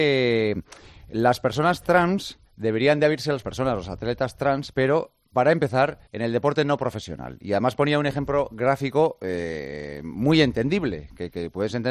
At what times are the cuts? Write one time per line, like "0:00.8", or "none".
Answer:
0:02.5
0:03.4
0:04.7
0:06.1